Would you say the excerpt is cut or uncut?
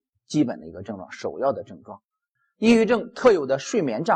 cut